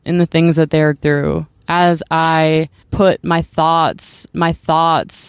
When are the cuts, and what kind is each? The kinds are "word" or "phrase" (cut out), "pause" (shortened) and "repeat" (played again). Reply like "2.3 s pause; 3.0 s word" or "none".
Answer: 1.0 s word; 2.8 s pause; 4.3 s repeat